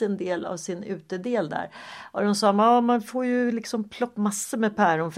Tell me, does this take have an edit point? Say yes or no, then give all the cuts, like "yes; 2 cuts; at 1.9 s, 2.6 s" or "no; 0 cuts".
yes; 1 cut; at 4.1 s